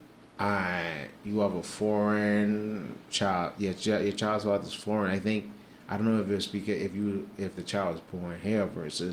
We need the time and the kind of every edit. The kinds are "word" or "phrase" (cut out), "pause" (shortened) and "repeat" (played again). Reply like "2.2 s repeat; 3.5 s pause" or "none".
none